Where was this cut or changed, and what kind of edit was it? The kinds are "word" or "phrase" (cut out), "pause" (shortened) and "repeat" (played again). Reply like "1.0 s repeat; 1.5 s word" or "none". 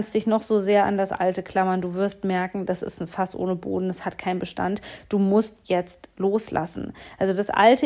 none